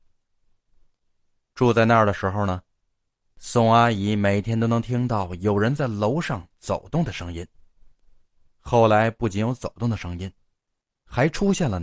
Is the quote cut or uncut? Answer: uncut